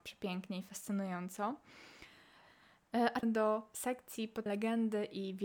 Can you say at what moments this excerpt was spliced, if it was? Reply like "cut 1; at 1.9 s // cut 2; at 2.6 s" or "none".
cut 1; at 3.2 s // cut 2; at 4.5 s